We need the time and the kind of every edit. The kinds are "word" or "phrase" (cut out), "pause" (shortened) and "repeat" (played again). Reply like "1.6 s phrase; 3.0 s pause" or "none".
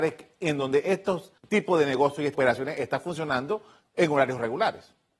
1.4 s pause; 2.3 s phrase